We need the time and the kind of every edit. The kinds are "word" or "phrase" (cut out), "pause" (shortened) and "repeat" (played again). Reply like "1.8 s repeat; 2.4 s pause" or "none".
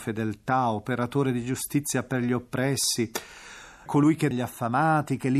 3.9 s word; 4.3 s phrase